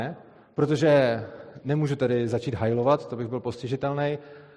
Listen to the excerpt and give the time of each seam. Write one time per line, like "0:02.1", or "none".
none